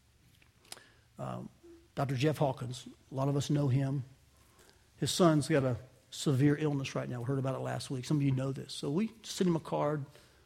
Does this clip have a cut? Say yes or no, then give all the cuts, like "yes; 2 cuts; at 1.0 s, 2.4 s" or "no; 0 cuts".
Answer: no; 0 cuts